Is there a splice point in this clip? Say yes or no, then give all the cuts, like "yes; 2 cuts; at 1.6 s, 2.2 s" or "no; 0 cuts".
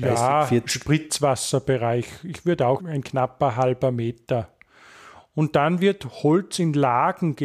yes; 1 cut; at 2.8 s